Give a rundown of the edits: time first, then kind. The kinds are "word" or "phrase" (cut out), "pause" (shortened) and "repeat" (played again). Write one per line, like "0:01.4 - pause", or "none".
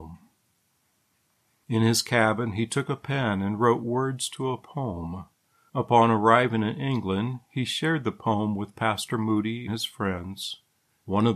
0:09.7 - word